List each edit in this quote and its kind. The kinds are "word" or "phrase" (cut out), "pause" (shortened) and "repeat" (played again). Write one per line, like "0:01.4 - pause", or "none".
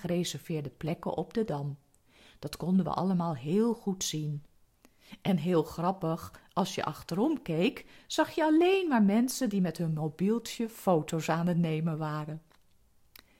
none